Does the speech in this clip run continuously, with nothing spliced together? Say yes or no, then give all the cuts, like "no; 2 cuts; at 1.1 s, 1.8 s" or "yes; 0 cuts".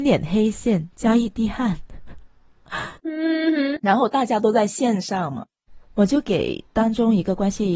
no; 1 cut; at 3.0 s